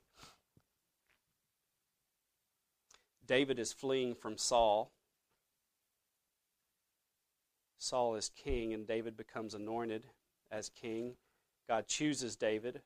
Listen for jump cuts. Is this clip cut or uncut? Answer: uncut